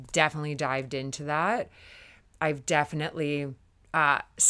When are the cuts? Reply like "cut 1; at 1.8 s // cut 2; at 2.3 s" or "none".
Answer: none